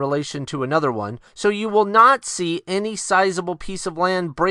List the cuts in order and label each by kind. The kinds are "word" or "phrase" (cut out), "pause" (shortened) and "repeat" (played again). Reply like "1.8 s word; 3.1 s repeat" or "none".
1.3 s pause